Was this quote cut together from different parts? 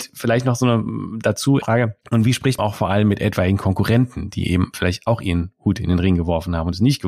yes; 3 cuts; at 1.6 s, 2.0 s, 2.6 s

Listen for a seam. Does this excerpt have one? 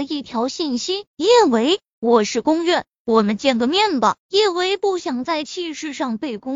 yes; 2 cuts; at 1.1 s, 4.2 s

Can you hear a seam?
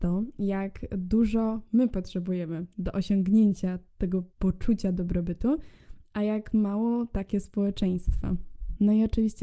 yes; 1 cut; at 4.3 s

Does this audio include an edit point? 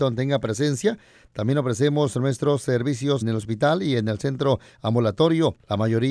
yes; 1 cut; at 3.2 s

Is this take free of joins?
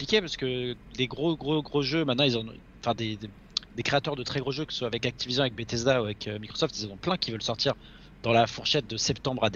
yes; 0 cuts

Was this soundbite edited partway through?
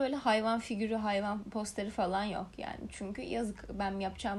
no; 0 cuts

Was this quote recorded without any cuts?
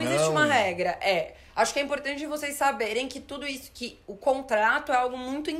yes; 0 cuts

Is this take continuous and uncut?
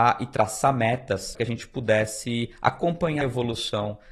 no; 2 cuts; at 1.3 s, 3.2 s

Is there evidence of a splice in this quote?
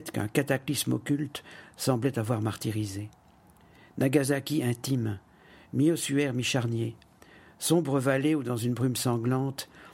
no; 0 cuts

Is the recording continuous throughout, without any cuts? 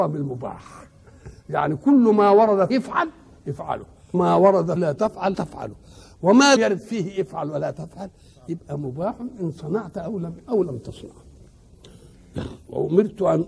no; 6 cuts; at 2.7 s, 4.1 s, 4.8 s, 5.3 s, 6.6 s, 10.4 s

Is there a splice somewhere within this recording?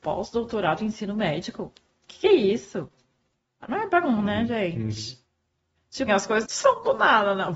yes; 5 cuts; at 1.9 s, 3.4 s, 4.0 s, 6.1 s, 6.4 s

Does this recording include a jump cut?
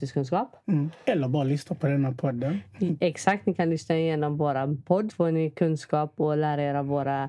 yes; 1 cut; at 5.1 s

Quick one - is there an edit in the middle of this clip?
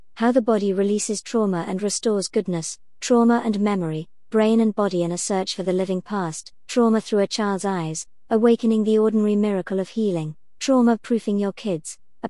no; 0 cuts

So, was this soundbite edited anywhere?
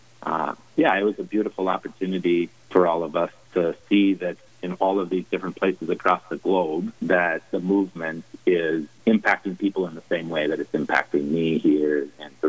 yes; 3 cuts; at 2.7 s, 7.0 s, 9.0 s

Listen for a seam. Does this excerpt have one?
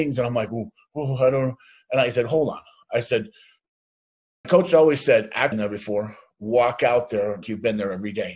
yes; 3 cuts; at 4.4 s, 5.5 s, 7.4 s

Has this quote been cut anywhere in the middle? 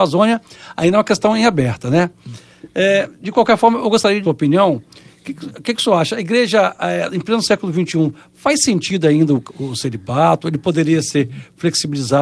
yes; 1 cut; at 4.2 s

